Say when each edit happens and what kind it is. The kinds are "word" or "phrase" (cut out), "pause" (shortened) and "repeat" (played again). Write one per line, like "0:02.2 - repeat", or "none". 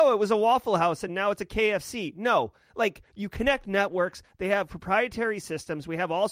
none